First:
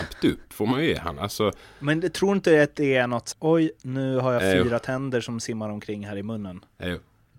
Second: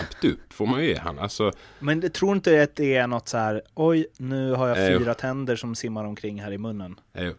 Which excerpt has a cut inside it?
first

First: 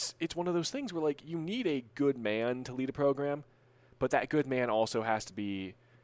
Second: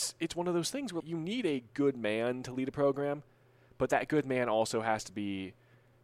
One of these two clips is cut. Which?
second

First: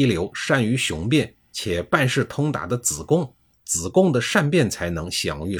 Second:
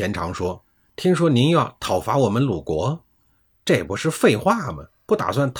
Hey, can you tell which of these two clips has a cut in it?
first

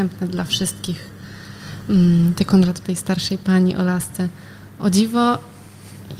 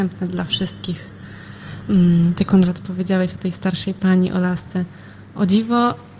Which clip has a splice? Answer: first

